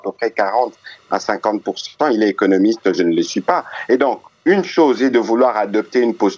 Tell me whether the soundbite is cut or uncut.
uncut